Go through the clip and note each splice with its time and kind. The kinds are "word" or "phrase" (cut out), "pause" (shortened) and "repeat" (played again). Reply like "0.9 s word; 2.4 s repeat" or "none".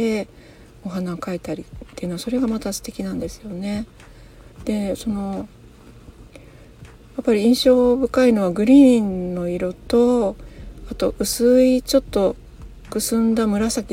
4.5 s pause